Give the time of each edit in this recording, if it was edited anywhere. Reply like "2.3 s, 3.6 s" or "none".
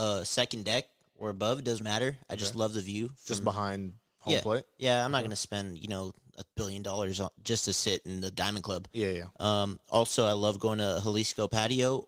1.8 s, 6.5 s